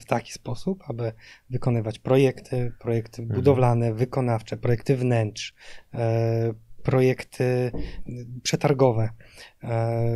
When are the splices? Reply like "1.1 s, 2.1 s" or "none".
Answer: none